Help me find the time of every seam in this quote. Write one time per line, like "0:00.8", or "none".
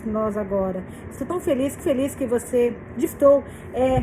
0:01.8
0:03.1